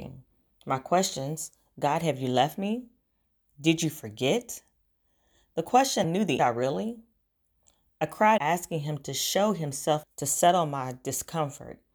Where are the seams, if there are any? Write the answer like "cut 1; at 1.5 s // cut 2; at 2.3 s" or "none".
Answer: cut 1; at 6.0 s // cut 2; at 6.4 s // cut 3; at 8.4 s // cut 4; at 10.0 s